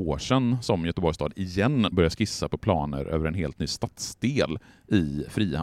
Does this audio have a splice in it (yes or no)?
yes